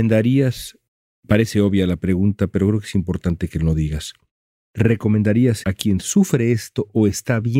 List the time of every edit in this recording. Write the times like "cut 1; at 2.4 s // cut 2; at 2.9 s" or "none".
cut 1; at 5.6 s